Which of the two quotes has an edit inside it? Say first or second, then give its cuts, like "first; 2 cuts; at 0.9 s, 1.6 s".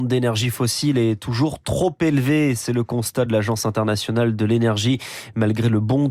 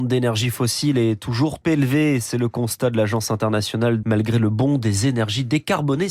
second; 2 cuts; at 1.6 s, 4.0 s